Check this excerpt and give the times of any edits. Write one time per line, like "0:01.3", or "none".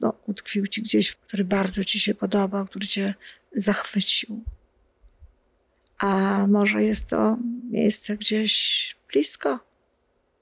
0:01.2